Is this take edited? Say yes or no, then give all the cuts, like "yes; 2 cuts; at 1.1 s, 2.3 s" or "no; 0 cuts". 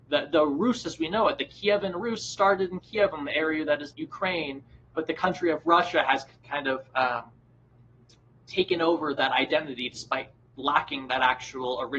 yes; 1 cut; at 3.9 s